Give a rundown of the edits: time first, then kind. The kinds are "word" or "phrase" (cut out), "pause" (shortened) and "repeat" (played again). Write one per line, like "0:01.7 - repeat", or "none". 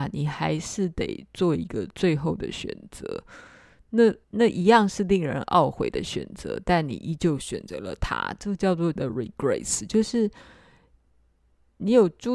0:04.2 - pause
0:09.0 - word

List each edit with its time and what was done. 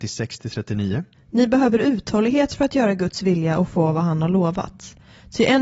0:01.1 - pause

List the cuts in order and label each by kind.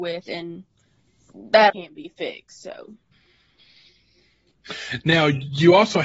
0:01.7 - word

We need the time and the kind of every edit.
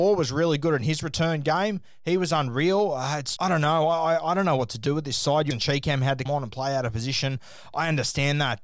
0:03.4 - word
0:05.5 - phrase
0:06.3 - word

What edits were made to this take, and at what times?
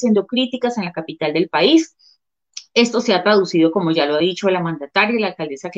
none

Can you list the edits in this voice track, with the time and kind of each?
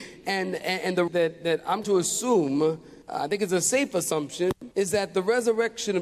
0:01.1 - word
0:01.8 - word
0:03.0 - pause
0:04.7 - pause

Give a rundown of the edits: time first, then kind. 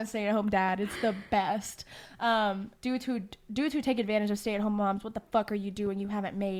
0:02.8 - pause

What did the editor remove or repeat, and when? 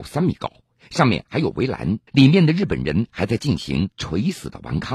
0:02.1 - pause

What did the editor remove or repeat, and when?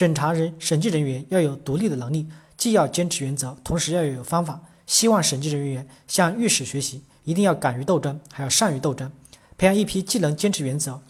none

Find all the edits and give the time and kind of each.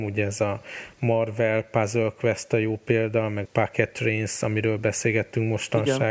0:03.4 - word

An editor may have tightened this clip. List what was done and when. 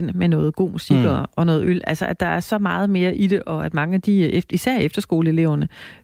none

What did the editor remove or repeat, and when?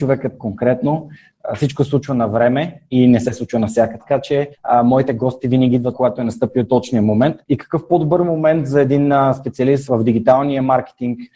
0:04.0 - word
0:04.5 - pause
0:05.9 - word
0:07.4 - pause
0:09.9 - word

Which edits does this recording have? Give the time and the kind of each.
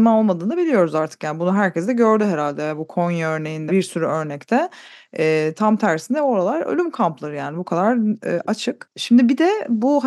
0:03.7 - word

